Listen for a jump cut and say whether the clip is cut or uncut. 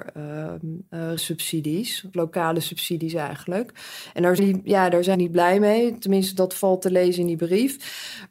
cut